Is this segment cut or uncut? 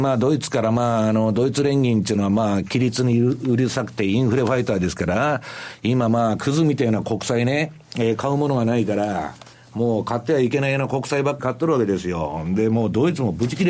cut